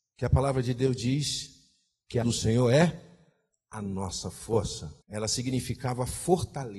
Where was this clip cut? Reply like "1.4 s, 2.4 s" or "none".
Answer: 2.2 s, 5.0 s